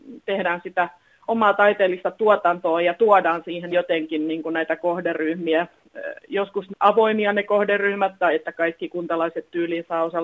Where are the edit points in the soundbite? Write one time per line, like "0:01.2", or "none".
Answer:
0:01.3
0:03.7
0:06.7